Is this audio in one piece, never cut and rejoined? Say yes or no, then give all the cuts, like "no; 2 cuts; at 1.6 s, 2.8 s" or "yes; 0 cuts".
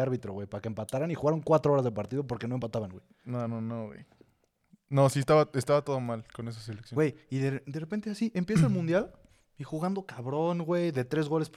yes; 0 cuts